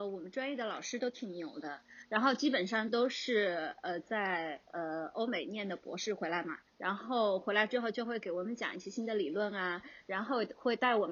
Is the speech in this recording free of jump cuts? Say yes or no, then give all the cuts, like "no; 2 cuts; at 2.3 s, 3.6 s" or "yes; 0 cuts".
no; 1 cut; at 6.7 s